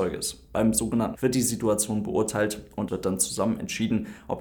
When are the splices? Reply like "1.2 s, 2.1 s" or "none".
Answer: 1.2 s, 2.9 s

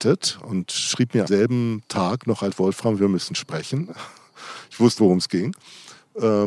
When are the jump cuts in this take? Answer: 1.3 s, 2.5 s, 5.0 s

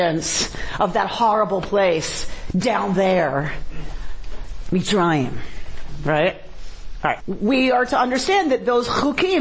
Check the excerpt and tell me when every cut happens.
7.2 s

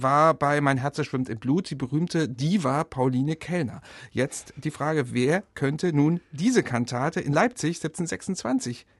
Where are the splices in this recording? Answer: none

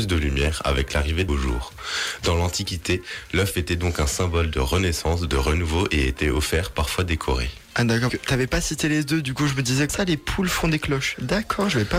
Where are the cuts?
1.3 s, 8.1 s, 9.9 s

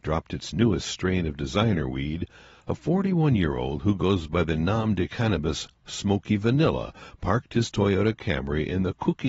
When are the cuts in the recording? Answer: none

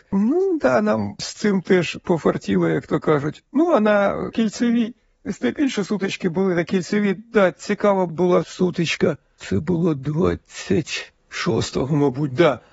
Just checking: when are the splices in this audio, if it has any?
11.2 s

